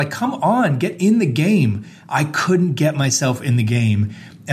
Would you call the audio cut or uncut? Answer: uncut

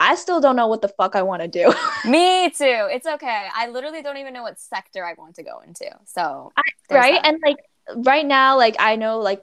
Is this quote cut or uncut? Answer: uncut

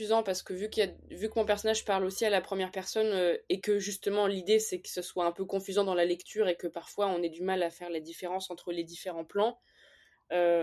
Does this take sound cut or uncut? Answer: uncut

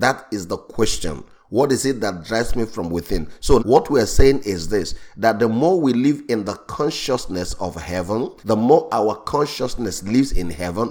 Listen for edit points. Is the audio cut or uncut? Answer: cut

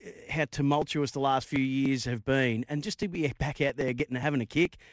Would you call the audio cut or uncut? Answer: uncut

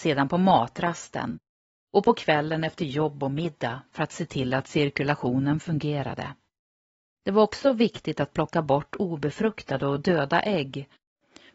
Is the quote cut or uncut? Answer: uncut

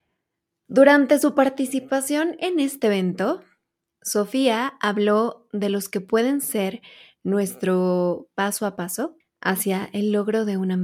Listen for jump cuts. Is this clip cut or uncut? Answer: cut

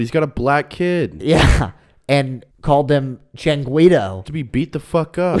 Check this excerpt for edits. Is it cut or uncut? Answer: cut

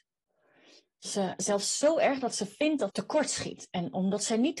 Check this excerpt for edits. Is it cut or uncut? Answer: cut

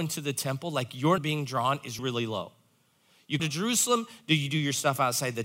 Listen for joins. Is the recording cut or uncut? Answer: cut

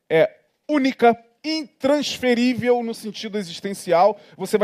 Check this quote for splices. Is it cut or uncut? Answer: uncut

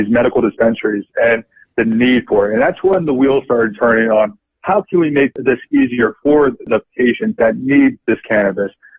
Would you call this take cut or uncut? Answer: uncut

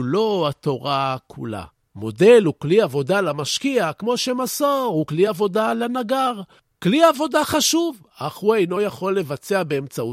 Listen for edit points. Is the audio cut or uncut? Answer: uncut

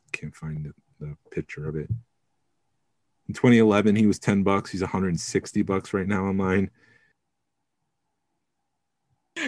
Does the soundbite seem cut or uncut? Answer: uncut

